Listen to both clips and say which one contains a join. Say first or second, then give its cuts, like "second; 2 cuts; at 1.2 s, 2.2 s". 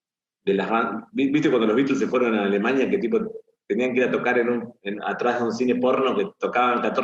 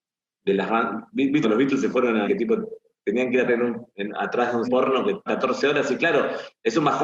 second; 5 cuts; at 1.4 s, 2.2 s, 3.5 s, 4.6 s, 5.3 s